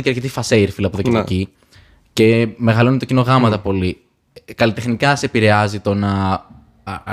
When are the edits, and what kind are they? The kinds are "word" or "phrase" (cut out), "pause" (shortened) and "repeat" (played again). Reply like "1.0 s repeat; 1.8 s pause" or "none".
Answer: none